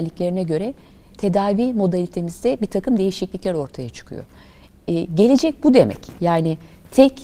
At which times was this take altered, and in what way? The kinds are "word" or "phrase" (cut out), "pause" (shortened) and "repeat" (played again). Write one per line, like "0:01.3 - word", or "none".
0:01.1 - word